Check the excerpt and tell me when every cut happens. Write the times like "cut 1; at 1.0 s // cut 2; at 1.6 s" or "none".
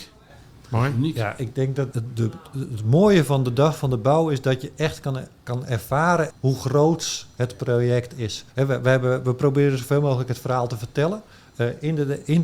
cut 1; at 1.9 s // cut 2; at 6.3 s // cut 3; at 8.5 s